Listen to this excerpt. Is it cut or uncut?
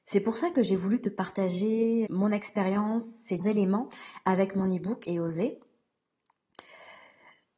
cut